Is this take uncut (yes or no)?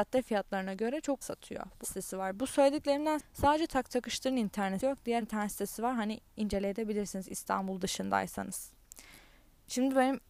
no